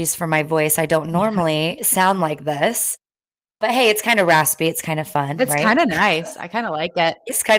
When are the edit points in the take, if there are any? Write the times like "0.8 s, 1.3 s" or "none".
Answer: none